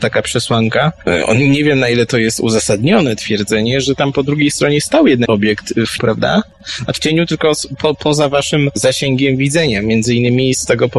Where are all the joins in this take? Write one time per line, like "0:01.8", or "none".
0:05.3
0:06.0
0:07.0

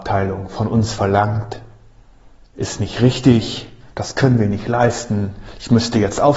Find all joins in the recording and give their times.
none

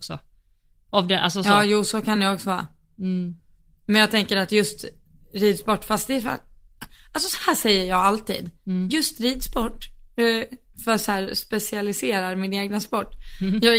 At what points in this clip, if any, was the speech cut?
none

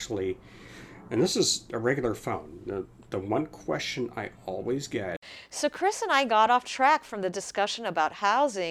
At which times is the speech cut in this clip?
none

